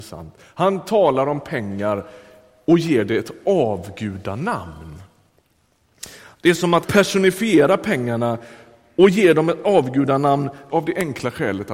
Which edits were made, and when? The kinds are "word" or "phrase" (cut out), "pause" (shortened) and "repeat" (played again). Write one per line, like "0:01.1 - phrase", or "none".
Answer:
0:06.8 - word
0:10.7 - word